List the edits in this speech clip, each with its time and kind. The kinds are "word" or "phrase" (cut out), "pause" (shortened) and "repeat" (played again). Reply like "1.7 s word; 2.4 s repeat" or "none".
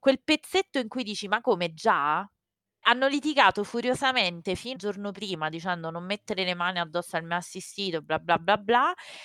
2.8 s word; 4.8 s word